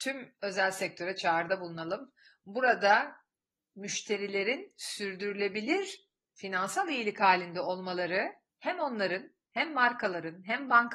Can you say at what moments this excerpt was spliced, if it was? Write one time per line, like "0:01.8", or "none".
none

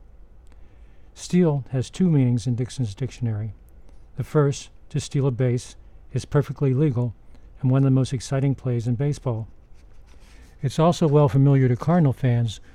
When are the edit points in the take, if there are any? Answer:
none

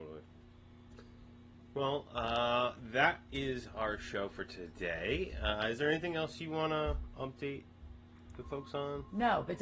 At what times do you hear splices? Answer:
none

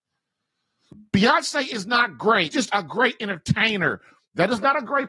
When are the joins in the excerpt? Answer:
0:02.5

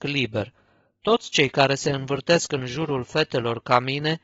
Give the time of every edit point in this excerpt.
none

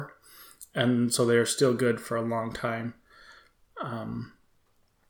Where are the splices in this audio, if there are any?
none

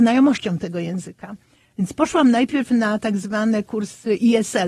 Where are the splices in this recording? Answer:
none

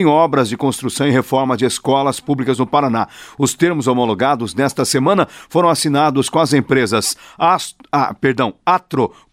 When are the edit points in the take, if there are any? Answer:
none

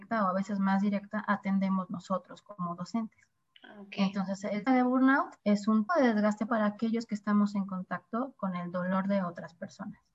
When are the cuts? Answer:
0:04.7
0:05.4
0:05.9
0:06.5

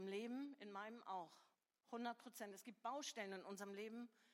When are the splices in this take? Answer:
0:01.5

